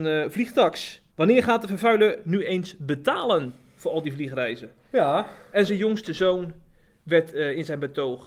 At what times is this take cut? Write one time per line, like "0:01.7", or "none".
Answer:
0:01.1
0:05.7